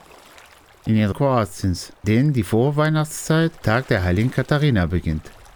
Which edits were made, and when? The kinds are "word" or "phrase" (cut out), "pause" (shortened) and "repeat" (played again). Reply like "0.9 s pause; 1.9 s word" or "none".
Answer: 1.1 s word; 2.0 s word; 3.6 s word